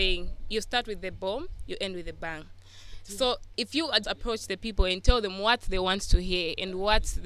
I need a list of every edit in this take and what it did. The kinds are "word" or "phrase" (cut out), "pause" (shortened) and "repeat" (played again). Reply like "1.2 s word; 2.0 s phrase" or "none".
3.5 s phrase; 4.0 s word